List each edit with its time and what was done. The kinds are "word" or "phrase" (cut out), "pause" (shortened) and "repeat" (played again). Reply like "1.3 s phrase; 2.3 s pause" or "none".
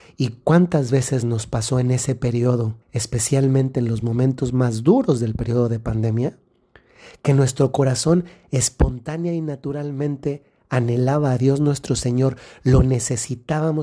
2.8 s pause